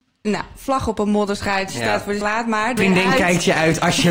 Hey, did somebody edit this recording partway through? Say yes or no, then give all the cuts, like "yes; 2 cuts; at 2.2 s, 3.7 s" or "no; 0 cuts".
yes; 2 cuts; at 2.2 s, 2.8 s